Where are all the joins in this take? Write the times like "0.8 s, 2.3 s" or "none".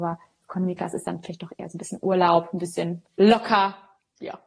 3.0 s